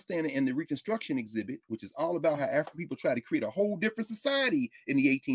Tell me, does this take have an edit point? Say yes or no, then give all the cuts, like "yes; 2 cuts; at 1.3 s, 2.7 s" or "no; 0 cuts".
no; 0 cuts